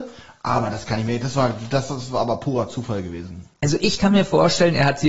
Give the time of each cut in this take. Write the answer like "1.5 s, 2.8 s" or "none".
none